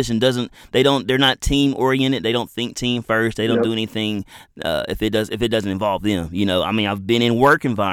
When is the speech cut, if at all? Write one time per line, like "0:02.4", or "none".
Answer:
none